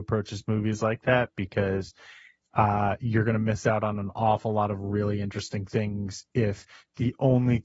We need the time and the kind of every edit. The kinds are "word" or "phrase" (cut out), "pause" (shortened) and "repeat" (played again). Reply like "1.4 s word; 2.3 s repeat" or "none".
none